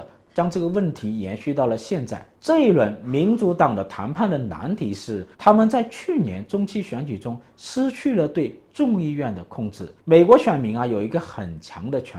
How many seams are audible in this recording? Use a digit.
3